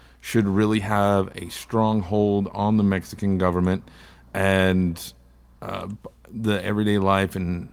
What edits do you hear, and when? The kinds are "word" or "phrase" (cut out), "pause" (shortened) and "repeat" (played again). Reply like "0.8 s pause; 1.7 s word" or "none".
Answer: none